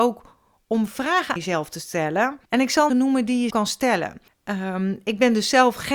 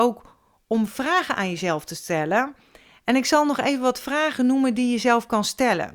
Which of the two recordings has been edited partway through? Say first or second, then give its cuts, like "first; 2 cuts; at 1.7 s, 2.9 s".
first; 5 cuts; at 1.4 s, 2.4 s, 2.9 s, 3.5 s, 4.3 s